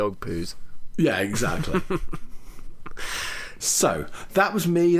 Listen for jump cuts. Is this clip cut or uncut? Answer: cut